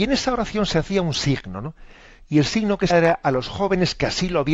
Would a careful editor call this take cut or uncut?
cut